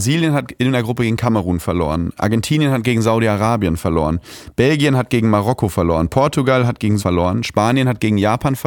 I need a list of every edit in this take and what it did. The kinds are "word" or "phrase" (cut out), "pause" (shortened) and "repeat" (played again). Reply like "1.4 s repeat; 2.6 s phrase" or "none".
7.0 s word